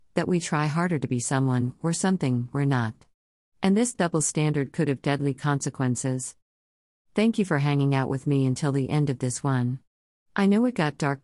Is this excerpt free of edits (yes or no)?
yes